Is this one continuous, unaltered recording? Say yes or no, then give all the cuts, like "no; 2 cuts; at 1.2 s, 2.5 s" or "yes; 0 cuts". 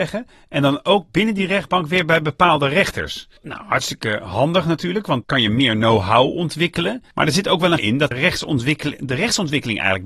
no; 5 cuts; at 3.4 s, 5.2 s, 7.1 s, 7.8 s, 8.1 s